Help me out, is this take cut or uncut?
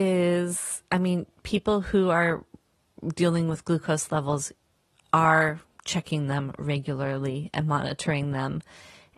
uncut